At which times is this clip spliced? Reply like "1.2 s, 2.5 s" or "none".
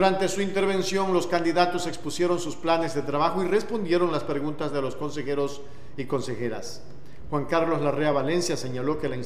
none